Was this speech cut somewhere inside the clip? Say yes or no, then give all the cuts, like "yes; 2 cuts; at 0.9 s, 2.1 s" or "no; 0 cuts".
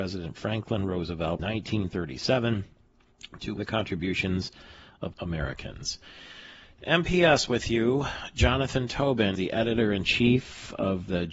yes; 4 cuts; at 1.4 s, 3.6 s, 5.1 s, 9.4 s